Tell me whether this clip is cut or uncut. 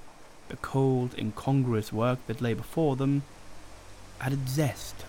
uncut